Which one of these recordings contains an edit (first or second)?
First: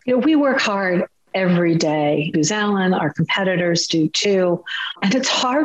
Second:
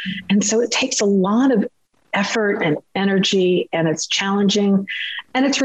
first